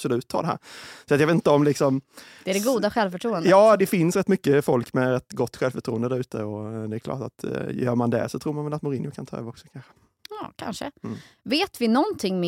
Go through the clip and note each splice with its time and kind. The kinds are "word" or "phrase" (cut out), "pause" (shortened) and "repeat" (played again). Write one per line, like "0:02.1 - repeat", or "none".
0:03.8 - word